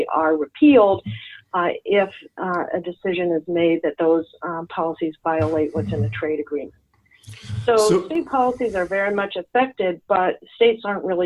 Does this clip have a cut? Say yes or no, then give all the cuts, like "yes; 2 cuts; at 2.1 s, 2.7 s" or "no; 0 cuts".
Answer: no; 0 cuts